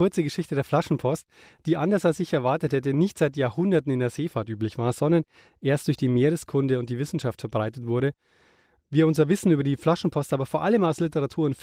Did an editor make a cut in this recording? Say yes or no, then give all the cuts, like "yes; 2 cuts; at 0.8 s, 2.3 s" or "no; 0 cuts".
no; 0 cuts